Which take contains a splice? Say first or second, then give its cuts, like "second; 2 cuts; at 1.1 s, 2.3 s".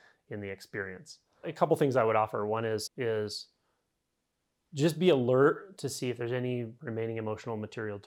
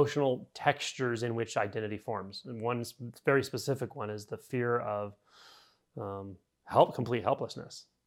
first; 1 cut; at 2.9 s